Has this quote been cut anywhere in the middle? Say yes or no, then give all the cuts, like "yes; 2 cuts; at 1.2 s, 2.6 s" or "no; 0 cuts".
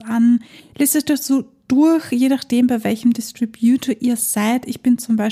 no; 0 cuts